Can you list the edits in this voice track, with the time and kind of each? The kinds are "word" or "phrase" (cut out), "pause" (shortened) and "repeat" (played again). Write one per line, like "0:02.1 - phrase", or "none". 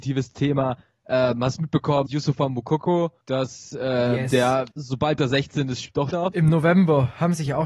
0:02.1 - word
0:03.2 - pause
0:04.7 - pause
0:06.1 - word